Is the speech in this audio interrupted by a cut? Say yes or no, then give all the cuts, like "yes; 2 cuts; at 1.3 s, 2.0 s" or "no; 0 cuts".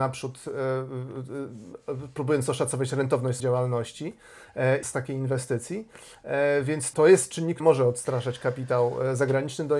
yes; 4 cuts; at 3.4 s, 4.8 s, 6.9 s, 7.6 s